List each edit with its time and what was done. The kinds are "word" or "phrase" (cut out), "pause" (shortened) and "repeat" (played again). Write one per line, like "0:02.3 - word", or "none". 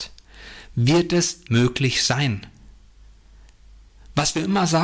0:01.5 - word